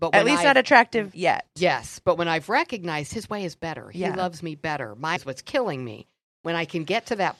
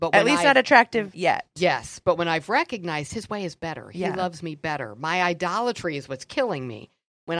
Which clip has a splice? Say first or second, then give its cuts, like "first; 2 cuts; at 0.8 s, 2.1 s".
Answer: first; 1 cut; at 5.2 s